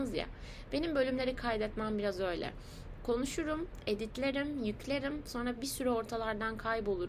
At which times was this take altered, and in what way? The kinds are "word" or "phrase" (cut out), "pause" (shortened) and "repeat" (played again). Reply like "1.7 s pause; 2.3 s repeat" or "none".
none